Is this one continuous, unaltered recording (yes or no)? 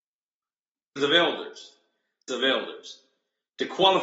no